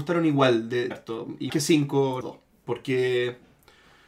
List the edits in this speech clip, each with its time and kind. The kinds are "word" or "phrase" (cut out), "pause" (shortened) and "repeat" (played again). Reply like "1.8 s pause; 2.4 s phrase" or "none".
0.9 s word; 1.5 s word; 2.2 s word